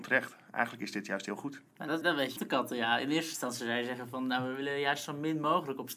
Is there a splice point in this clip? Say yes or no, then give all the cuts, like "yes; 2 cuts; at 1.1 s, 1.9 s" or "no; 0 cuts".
yes; 2 cuts; at 2.0 s, 2.4 s